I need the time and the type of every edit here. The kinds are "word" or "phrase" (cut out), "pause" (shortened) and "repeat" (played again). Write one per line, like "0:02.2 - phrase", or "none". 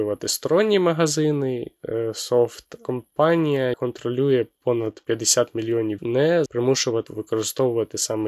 0:03.7 - word
0:05.1 - pause
0:06.0 - word
0:06.5 - word
0:07.1 - word